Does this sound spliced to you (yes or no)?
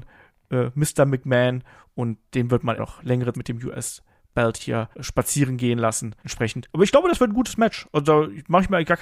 yes